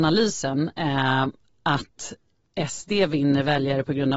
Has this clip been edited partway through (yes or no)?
no